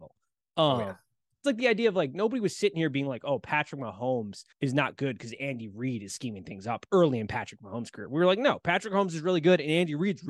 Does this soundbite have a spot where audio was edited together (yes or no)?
yes